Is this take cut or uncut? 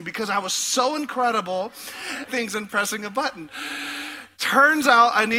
cut